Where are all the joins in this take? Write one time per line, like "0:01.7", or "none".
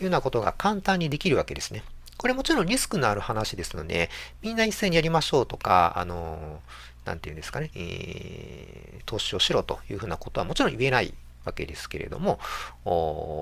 0:07.7